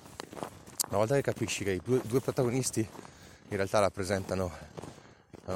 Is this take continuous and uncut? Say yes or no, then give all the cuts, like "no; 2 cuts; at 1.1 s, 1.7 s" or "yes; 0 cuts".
yes; 0 cuts